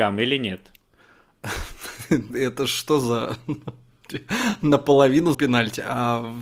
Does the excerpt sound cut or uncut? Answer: cut